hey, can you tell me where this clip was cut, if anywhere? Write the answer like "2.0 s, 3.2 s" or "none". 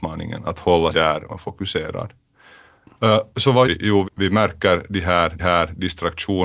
0.9 s, 1.3 s, 3.6 s, 4.0 s, 5.4 s